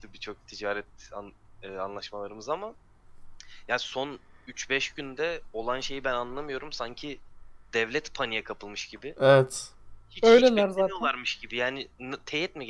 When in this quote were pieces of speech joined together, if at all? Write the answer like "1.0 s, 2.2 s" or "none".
none

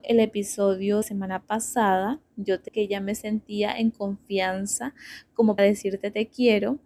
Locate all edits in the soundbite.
1.0 s, 2.7 s, 5.6 s

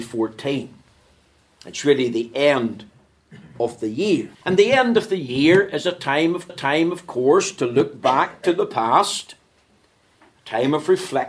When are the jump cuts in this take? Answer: 4.3 s, 6.5 s

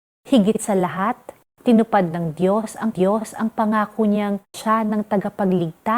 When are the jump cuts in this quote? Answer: 1.4 s, 2.9 s, 4.5 s

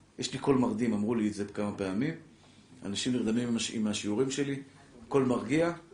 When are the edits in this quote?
none

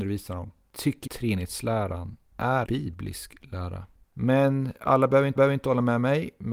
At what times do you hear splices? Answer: 1.1 s, 2.6 s, 5.4 s

